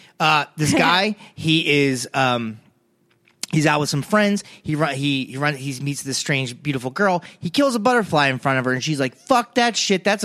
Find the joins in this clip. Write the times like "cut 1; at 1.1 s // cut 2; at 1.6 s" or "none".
none